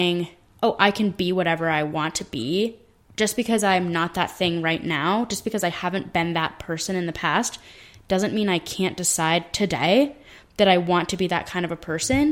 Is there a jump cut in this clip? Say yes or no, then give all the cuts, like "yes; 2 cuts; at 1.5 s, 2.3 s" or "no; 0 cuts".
no; 0 cuts